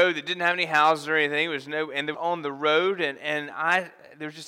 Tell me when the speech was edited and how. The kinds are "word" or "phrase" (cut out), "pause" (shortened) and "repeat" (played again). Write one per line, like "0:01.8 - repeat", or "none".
0:02.1 - phrase